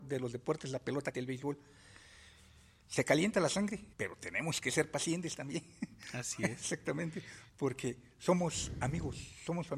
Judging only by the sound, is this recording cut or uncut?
cut